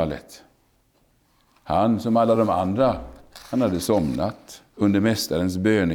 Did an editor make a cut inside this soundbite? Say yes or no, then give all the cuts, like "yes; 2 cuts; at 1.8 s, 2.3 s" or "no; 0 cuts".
no; 0 cuts